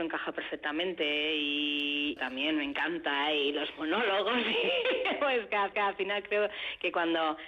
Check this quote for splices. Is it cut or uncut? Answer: cut